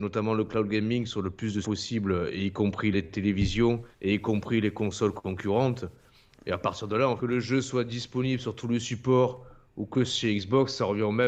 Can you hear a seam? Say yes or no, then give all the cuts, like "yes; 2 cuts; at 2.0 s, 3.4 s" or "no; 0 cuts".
yes; 4 cuts; at 1.6 s, 2.9 s, 3.9 s, 7.2 s